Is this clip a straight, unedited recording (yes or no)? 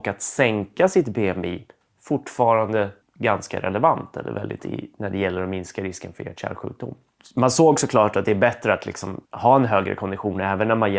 no